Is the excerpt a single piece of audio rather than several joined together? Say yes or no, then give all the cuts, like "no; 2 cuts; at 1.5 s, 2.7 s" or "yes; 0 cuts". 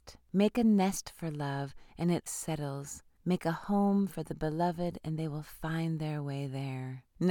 no; 1 cut; at 2.3 s